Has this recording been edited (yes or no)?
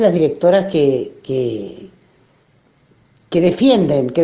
no